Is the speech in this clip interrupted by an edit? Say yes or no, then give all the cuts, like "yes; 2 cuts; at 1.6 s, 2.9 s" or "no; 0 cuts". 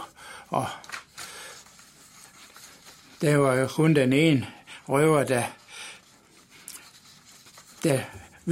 no; 0 cuts